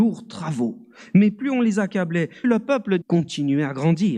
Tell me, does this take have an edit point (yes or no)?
yes